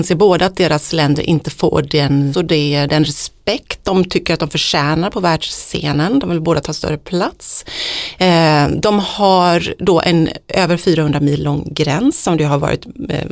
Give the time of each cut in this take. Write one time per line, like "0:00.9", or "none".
0:02.3